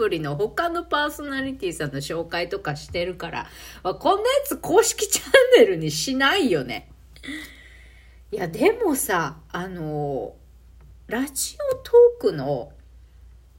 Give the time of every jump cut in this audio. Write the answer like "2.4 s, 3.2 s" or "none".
none